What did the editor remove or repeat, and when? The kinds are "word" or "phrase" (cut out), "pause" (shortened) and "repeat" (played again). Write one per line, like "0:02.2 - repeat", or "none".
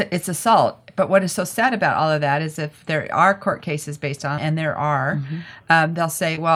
0:04.4 - word